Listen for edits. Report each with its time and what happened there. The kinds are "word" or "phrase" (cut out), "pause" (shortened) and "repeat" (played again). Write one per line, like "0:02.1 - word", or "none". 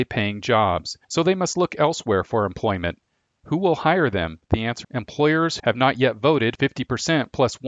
0:01.0 - pause
0:04.4 - pause
0:04.8 - phrase
0:05.6 - phrase